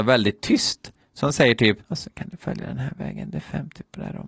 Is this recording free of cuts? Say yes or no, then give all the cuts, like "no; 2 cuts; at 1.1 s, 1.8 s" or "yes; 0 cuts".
no; 1 cut; at 1.8 s